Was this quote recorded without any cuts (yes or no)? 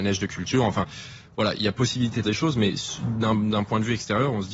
no